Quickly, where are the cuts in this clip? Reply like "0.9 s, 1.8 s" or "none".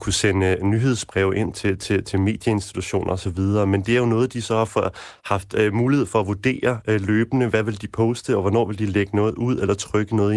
1.5 s